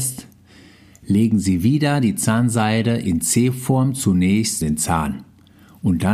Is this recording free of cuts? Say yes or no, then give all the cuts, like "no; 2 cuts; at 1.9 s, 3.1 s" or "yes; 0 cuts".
no; 1 cut; at 4.6 s